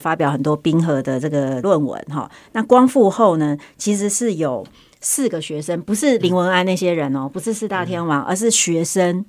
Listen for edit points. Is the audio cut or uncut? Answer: uncut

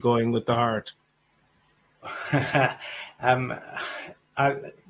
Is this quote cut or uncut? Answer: uncut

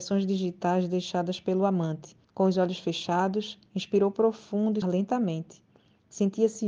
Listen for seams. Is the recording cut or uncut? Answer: cut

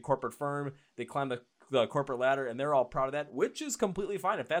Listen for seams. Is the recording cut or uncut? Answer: uncut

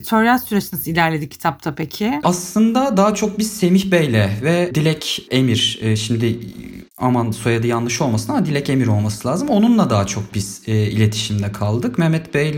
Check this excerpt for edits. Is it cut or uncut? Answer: uncut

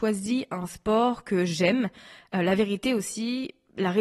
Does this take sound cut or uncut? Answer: uncut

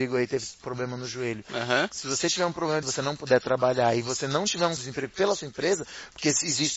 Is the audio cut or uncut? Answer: cut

